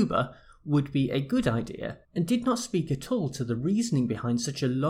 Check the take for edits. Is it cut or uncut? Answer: cut